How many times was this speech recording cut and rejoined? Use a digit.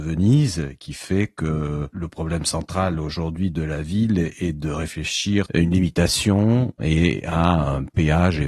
0